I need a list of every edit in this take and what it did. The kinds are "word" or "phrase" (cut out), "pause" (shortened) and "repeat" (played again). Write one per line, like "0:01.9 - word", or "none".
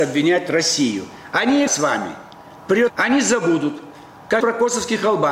0:01.7 - word
0:02.9 - word
0:04.4 - word